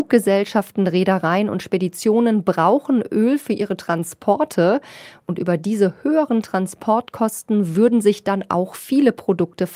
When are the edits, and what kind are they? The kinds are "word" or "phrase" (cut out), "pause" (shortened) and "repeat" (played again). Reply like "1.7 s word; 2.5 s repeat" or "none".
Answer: none

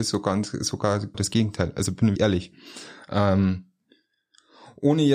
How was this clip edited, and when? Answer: 1.1 s word; 2.2 s word

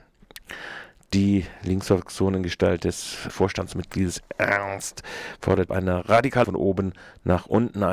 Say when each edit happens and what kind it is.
3.3 s word; 5.7 s word; 6.4 s word

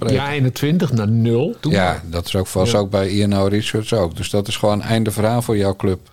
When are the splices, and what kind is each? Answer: 1.6 s pause

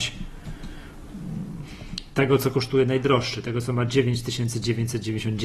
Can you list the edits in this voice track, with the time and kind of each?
none

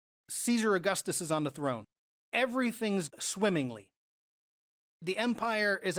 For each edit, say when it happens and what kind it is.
3.1 s word

